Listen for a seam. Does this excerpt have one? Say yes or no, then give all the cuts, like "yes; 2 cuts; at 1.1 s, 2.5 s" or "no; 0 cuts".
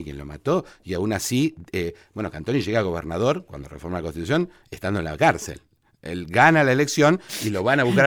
no; 0 cuts